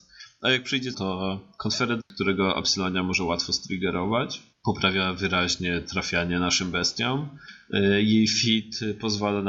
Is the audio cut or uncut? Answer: cut